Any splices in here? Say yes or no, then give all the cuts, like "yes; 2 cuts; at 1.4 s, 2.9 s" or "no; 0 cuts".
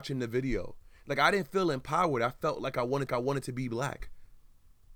yes; 1 cut; at 3.1 s